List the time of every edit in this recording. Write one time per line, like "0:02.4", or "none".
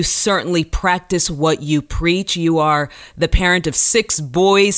none